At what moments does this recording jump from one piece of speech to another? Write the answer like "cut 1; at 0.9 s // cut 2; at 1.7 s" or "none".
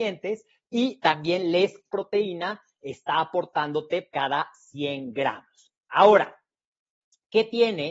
cut 1; at 1.9 s // cut 2; at 4.1 s